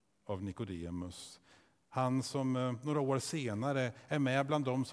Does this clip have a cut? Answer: no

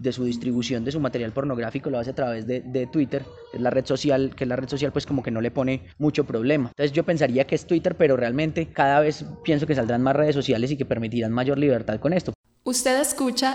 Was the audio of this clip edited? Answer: no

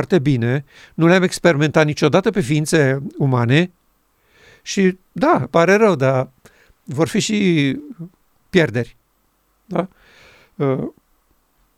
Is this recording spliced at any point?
yes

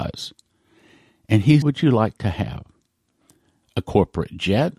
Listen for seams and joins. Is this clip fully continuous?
no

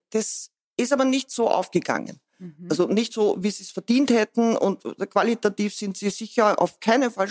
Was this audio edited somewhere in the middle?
no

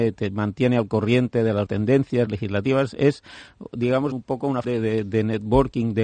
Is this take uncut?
no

